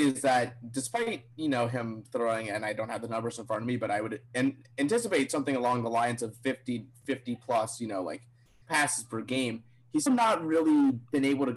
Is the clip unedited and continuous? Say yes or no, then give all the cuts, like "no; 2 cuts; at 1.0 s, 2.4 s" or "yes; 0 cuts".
no; 1 cut; at 10.1 s